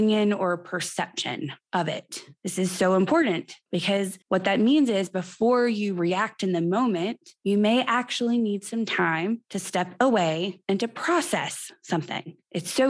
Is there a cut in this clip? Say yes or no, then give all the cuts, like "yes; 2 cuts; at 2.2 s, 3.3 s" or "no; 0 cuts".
yes; 2 cuts; at 1.6 s, 4.2 s